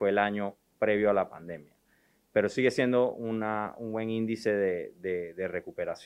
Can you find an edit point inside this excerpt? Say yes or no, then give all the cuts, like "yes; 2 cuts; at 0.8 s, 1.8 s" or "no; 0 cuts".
no; 0 cuts